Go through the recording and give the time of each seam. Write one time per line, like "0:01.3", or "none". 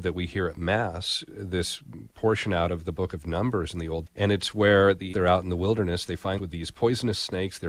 0:01.3
0:04.1
0:05.1
0:06.4